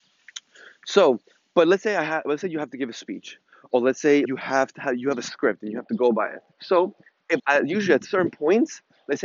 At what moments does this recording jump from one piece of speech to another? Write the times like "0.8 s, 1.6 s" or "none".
4.2 s, 6.5 s, 7.4 s